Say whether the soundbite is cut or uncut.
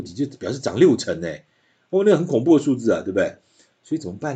uncut